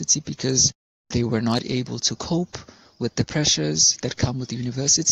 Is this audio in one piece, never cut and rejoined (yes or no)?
yes